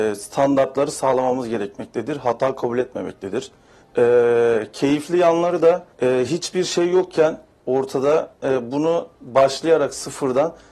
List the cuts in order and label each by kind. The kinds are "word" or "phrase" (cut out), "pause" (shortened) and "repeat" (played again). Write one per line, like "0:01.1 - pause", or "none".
0:03.8 - pause
0:05.9 - pause
0:09.1 - pause

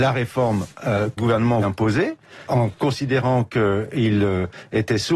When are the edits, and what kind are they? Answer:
0:01.2 - word
0:01.6 - word
0:02.5 - word

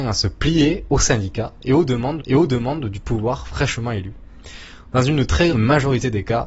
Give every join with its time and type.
0:02.2 - repeat
0:05.5 - word

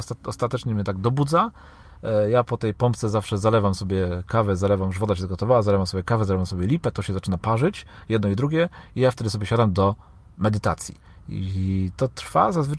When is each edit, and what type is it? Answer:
none

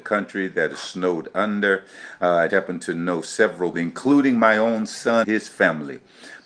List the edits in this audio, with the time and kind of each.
0:02.5 - word
0:03.7 - word
0:05.2 - word

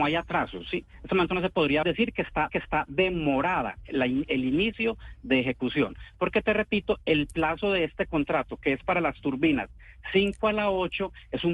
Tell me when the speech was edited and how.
0:01.8 - phrase
0:02.5 - repeat

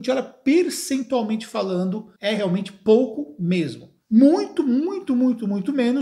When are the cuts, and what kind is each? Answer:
0:02.2 - pause
0:04.0 - pause

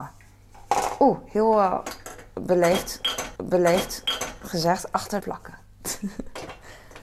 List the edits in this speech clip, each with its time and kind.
0:03.4 - repeat
0:05.2 - phrase

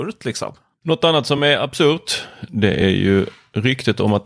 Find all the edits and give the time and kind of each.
none

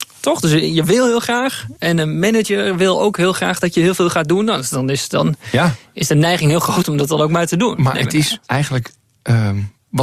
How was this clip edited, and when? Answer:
0:08.4 - pause

